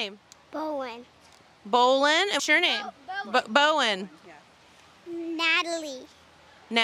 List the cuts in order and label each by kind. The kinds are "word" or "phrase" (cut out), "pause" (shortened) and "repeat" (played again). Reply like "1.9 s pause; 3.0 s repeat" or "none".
2.4 s word